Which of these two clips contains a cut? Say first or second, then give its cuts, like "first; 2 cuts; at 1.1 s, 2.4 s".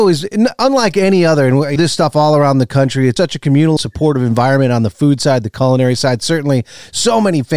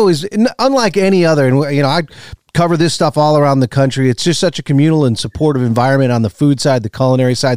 first; 3 cuts; at 1.8 s, 3.2 s, 3.8 s